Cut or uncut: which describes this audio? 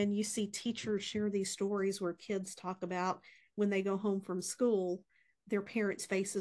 uncut